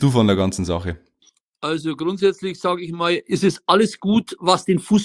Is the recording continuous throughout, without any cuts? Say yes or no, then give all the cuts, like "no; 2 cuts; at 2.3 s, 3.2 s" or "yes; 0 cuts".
yes; 0 cuts